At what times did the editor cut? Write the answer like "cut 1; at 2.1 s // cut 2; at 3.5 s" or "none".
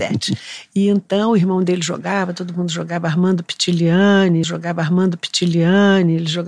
cut 1; at 4.4 s